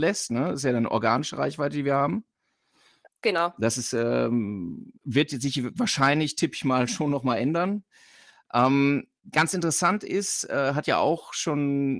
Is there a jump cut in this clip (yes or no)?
yes